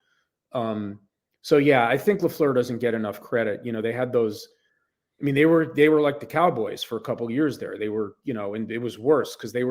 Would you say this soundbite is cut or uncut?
uncut